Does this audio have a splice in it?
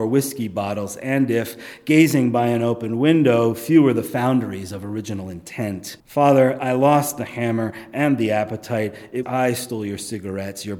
yes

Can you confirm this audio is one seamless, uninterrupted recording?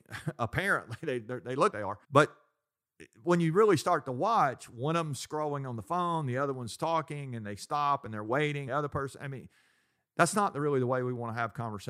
no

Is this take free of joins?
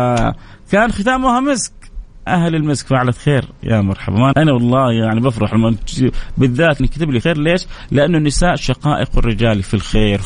no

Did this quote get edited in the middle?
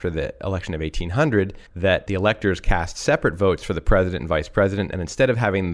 yes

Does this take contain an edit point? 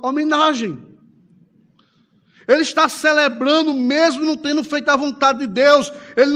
no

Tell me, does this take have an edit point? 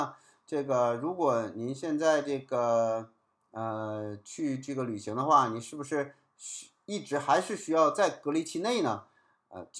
no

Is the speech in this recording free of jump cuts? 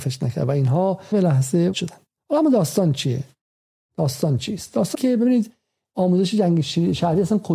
no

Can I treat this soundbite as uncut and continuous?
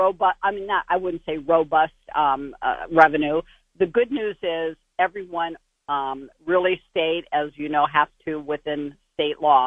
yes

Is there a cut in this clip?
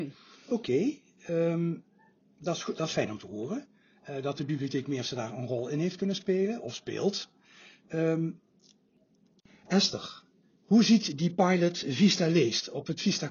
no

